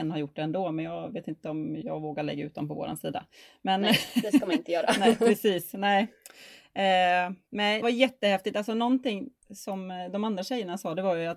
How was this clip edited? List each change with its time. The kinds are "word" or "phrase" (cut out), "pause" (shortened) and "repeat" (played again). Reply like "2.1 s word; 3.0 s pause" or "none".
7.8 s word